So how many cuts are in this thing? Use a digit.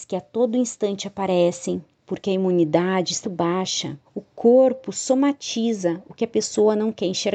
2